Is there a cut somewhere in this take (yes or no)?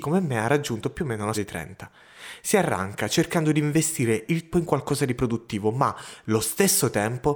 yes